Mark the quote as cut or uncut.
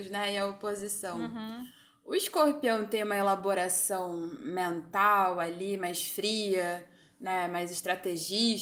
uncut